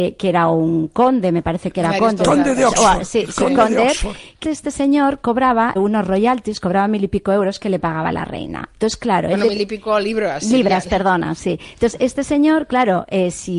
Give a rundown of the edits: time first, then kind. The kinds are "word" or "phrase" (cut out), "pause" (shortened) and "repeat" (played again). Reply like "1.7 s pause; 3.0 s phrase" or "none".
4.4 s word; 5.8 s word